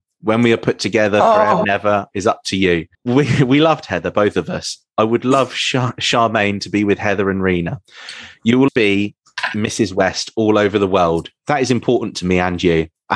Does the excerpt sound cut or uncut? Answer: cut